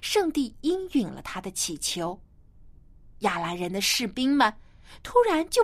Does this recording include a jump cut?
no; 0 cuts

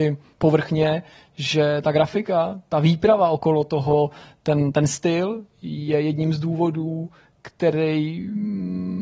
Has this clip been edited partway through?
no; 0 cuts

